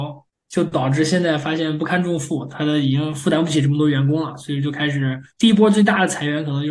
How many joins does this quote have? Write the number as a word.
one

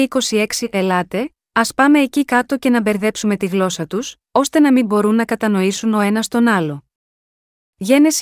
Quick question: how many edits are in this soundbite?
zero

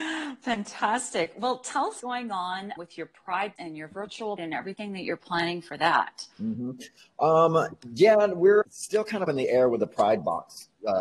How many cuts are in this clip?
seven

